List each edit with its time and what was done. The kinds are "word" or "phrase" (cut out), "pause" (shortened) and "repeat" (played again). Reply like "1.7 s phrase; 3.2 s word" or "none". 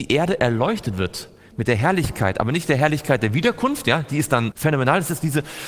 4.5 s word